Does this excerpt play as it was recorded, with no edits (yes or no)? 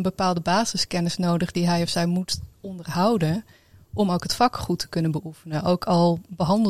yes